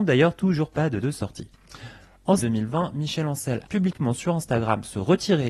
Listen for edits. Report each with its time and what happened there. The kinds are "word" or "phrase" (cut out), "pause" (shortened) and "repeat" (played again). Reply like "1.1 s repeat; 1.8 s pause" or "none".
1.0 s word; 2.4 s word; 3.6 s word